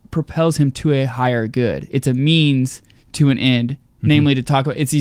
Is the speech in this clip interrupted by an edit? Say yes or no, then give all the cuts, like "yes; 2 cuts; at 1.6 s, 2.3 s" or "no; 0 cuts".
no; 0 cuts